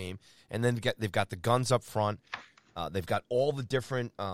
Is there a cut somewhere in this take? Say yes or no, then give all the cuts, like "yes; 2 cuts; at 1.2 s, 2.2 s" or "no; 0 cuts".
no; 0 cuts